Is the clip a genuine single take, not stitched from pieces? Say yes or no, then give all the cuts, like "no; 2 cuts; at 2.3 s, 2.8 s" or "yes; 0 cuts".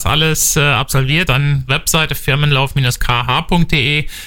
no; 2 cuts; at 1.3 s, 1.7 s